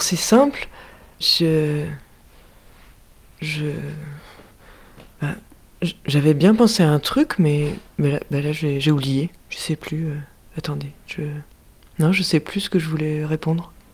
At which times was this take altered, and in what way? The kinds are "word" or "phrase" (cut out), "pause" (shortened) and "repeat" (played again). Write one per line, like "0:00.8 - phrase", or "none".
0:01.2 - word